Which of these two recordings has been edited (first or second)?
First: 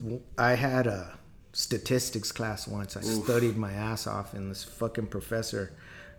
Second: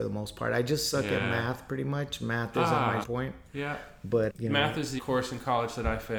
second